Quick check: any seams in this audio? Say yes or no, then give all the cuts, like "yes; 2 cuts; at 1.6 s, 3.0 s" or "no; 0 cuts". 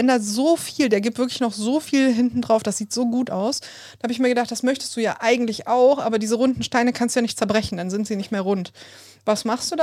no; 0 cuts